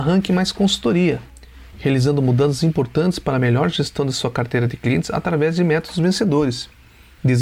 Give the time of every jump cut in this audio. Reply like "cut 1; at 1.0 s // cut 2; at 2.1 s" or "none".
none